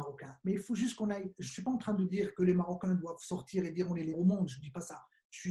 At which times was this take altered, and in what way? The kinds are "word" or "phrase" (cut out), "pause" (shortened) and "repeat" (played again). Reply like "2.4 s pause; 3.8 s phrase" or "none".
4.1 s word